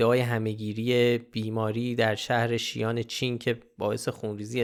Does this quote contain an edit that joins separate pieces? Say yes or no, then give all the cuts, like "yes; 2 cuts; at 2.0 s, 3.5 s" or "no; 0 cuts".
no; 0 cuts